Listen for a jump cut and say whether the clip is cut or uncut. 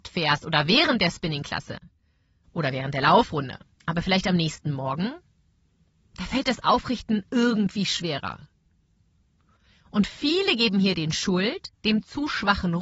uncut